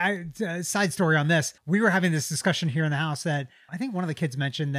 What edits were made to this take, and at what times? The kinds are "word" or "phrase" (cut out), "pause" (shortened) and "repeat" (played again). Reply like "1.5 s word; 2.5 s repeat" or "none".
1.6 s pause; 3.7 s word